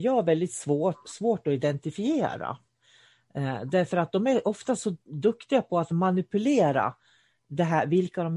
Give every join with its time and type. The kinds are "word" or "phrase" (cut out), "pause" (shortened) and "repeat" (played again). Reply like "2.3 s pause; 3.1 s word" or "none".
5.0 s pause

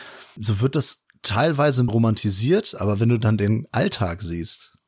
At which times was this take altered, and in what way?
1.9 s word

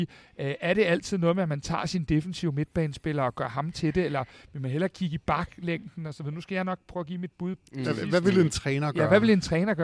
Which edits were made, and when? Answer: none

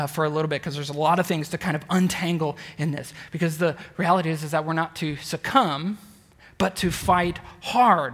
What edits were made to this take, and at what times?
none

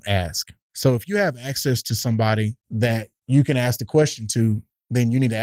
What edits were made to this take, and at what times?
2.6 s pause

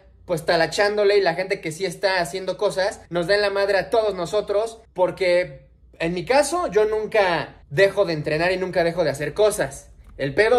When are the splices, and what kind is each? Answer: 3.1 s pause; 4.8 s pause; 7.6 s pause

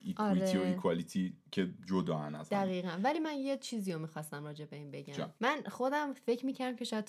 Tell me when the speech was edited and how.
5.4 s pause

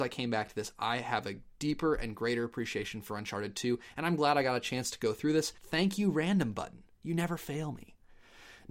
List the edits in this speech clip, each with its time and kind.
5.6 s pause

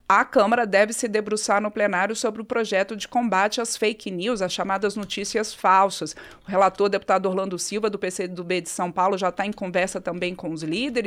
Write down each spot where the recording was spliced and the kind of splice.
none

